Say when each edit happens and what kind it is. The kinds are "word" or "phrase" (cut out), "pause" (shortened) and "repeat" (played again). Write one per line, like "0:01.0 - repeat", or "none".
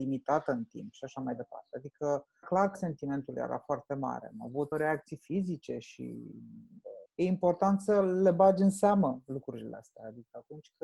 0:02.4 - word
0:02.7 - word
0:04.7 - word
0:07.1 - word